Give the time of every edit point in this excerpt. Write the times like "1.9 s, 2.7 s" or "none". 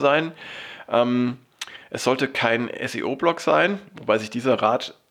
none